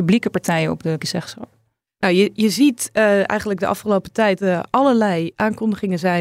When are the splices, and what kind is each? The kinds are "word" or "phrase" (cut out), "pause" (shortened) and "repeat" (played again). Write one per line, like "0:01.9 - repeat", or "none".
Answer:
0:01.0 - word
0:04.4 - phrase